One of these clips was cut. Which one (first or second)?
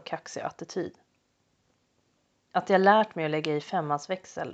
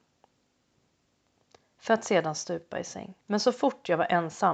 second